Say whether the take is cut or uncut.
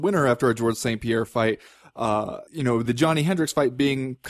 cut